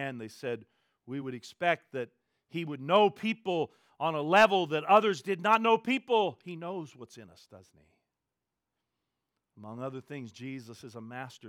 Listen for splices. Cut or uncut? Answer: uncut